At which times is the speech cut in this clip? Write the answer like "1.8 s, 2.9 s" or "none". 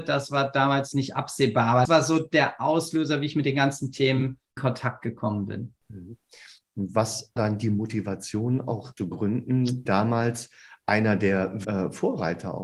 0.9 s, 1.8 s, 4.6 s, 7.4 s, 9.0 s, 9.9 s, 11.6 s